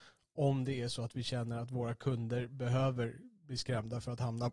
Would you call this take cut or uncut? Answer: uncut